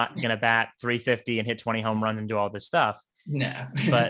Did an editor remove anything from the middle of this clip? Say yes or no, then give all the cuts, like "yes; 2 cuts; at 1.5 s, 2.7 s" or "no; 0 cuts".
no; 0 cuts